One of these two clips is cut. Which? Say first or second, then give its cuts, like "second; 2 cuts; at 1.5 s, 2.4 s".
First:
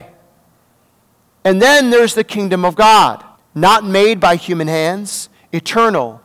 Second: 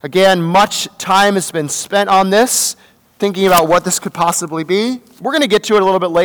first; 1 cut; at 3.3 s